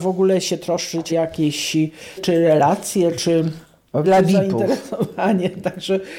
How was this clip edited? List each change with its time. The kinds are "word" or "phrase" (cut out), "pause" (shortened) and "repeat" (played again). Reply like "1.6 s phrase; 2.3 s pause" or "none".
1.1 s word; 2.2 s word; 4.0 s word